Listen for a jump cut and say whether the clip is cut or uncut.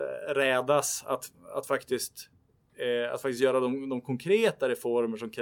uncut